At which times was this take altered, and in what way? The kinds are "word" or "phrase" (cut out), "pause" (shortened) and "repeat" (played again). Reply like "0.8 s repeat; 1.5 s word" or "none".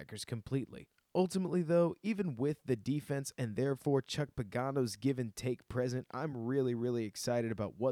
none